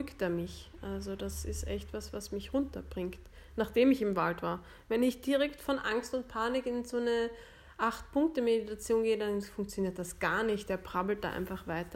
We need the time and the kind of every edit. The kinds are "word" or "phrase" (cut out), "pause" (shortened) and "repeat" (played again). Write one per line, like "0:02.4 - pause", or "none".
none